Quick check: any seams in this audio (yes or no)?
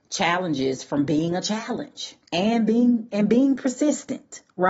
yes